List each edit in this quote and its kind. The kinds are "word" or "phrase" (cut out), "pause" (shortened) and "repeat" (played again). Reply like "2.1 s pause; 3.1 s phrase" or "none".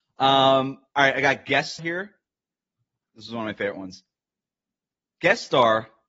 1.8 s word